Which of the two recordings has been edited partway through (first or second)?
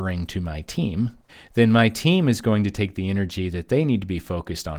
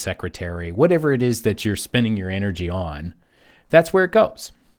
first